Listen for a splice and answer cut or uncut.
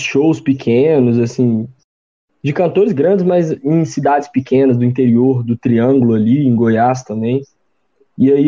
uncut